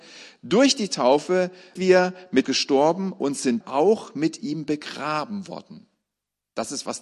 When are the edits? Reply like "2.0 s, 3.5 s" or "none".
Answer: 1.8 s, 2.4 s, 3.6 s